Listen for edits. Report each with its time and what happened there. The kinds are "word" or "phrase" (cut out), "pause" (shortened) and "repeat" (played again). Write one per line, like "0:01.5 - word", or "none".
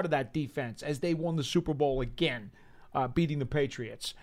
none